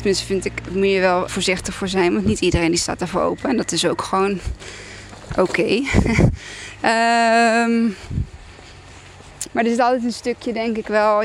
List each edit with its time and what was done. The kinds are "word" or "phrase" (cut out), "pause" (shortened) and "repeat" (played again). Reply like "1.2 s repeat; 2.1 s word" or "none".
1.3 s word